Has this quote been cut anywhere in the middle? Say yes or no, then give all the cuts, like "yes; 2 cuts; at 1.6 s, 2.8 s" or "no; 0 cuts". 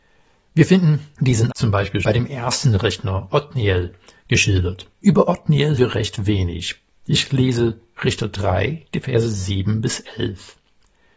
yes; 4 cuts; at 1.5 s, 2.0 s, 4.9 s, 5.8 s